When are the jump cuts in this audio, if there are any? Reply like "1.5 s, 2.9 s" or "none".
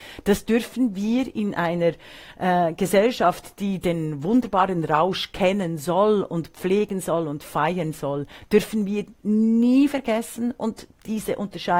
none

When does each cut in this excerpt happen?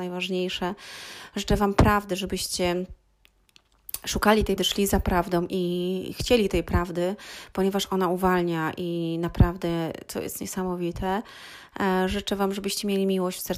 4.6 s

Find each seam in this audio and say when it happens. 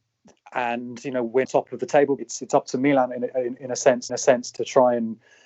1.4 s, 2.2 s, 4.1 s

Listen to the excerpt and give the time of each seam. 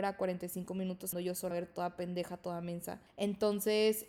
1.1 s, 1.5 s, 3.1 s

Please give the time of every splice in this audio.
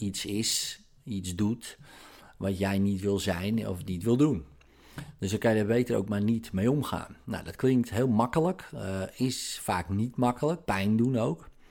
10.7 s

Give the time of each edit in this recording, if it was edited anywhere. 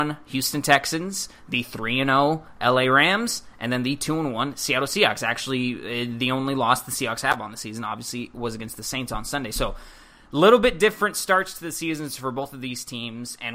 none

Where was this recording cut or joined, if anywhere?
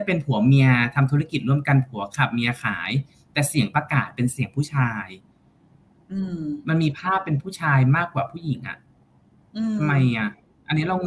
none

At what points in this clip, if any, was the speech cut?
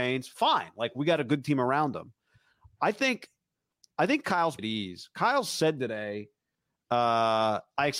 4.6 s

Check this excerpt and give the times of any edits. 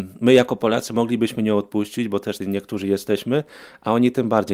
2.4 s

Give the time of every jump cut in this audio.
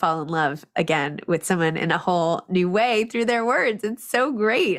none

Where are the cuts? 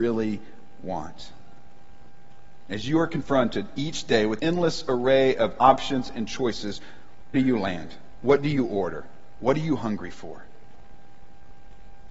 4.4 s, 7.3 s

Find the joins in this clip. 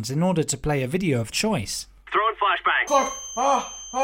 1.3 s, 2.9 s

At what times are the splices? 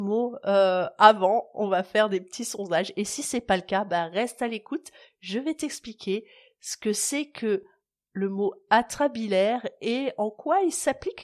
none

